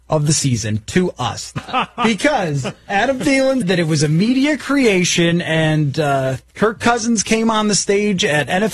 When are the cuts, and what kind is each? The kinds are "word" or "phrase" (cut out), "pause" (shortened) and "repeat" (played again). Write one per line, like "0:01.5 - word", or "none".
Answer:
0:01.6 - phrase
0:03.6 - word